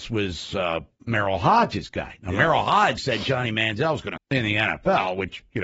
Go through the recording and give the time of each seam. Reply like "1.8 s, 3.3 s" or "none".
3.0 s, 4.2 s